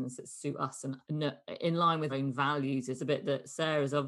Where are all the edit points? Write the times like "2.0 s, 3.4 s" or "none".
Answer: 1.0 s, 2.1 s, 3.0 s

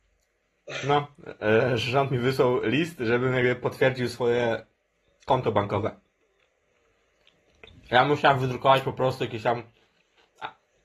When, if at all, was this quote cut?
none

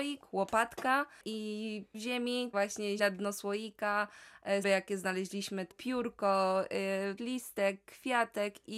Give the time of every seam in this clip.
1.9 s, 2.5 s, 3.0 s, 4.6 s, 5.7 s, 7.2 s

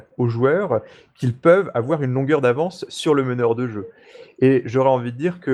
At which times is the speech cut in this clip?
none

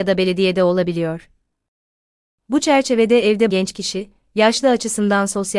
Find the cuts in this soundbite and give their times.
3.5 s

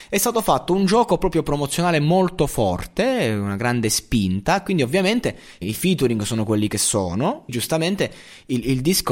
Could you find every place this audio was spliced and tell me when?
5.6 s, 7.5 s

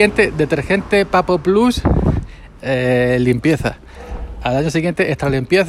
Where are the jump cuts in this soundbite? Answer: 2.6 s

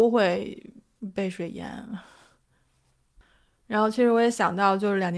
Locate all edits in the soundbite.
none

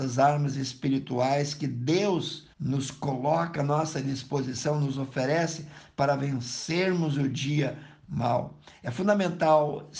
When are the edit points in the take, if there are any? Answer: 2.5 s

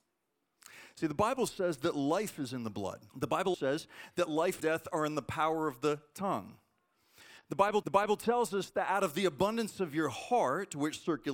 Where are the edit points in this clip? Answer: 3.1 s, 3.5 s, 4.6 s, 7.8 s

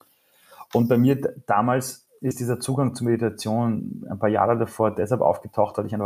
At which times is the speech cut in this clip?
none

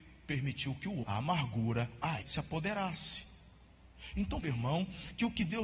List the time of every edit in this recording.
1.0 s, 2.2 s, 4.4 s

